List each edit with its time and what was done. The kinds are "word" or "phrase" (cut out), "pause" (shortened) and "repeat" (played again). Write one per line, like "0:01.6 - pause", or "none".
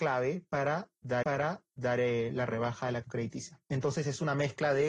0:01.2 - repeat
0:03.0 - word